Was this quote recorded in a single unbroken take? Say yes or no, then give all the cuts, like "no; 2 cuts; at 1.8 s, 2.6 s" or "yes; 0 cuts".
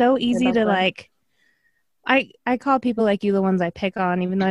yes; 0 cuts